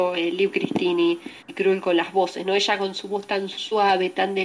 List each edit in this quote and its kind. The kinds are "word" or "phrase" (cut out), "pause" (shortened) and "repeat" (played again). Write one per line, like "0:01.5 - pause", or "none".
0:01.4 - pause